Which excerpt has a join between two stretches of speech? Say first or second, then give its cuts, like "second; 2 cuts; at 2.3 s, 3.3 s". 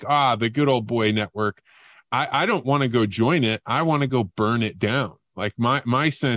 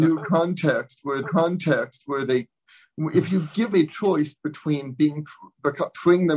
second; 2 cuts; at 1.2 s, 3.7 s